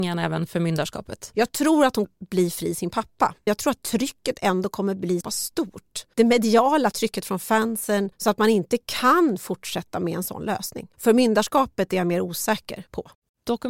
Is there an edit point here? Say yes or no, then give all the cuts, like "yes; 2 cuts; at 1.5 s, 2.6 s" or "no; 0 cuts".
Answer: yes; 3 cuts; at 2.0 s, 5.2 s, 6.9 s